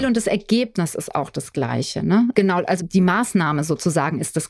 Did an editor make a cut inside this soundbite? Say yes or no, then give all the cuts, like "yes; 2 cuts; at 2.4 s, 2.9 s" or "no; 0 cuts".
yes; 1 cut; at 2.8 s